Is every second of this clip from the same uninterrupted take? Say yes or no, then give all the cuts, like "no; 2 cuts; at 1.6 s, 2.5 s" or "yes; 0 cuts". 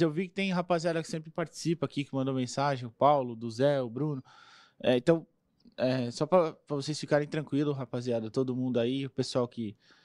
yes; 0 cuts